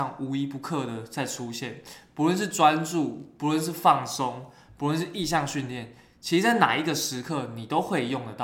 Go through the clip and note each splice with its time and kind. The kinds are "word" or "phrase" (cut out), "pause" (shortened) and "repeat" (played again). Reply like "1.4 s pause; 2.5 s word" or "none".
none